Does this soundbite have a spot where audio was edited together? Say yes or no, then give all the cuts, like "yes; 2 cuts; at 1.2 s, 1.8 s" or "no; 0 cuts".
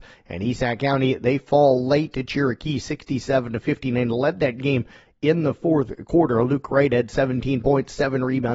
no; 0 cuts